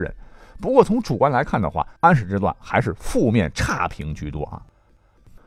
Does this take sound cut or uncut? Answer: cut